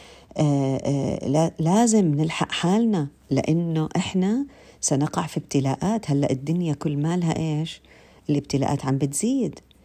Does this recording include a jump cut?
no; 0 cuts

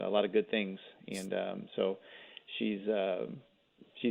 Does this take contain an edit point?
no; 0 cuts

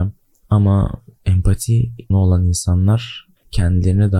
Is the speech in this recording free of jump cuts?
no; 1 cut; at 2.1 s

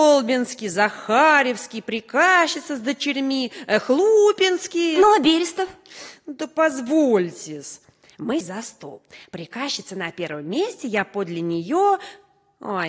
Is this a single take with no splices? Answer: no; 1 cut; at 8.4 s

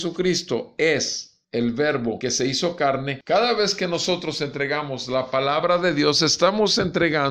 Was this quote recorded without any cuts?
yes; 0 cuts

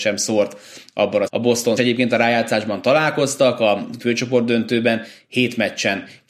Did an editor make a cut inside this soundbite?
yes; 3 cuts; at 1.3 s, 1.8 s, 4.0 s

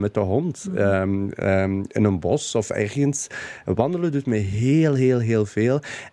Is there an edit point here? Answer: no; 0 cuts

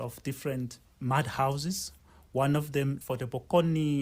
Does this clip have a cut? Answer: yes; 1 cut; at 3.0 s

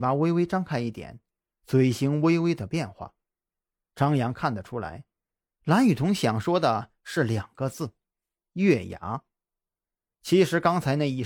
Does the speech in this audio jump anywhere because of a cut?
no; 0 cuts

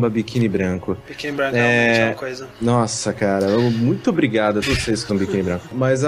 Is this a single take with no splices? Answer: no; 3 cuts; at 4.0 s, 4.6 s, 5.1 s

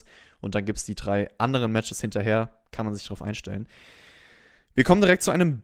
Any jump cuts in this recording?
no; 0 cuts

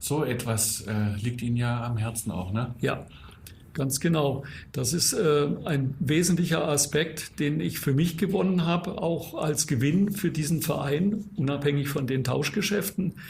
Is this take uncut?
yes; 0 cuts

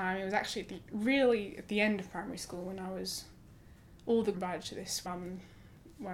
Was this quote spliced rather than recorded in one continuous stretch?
yes; 2 cuts; at 4.3 s, 5.0 s

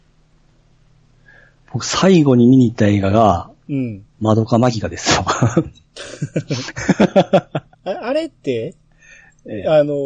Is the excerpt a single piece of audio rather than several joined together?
no; 2 cuts; at 4.1 s, 7.7 s

